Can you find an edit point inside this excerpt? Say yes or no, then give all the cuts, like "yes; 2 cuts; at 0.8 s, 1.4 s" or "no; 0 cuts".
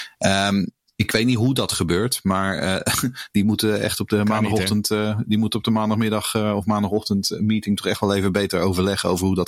no; 0 cuts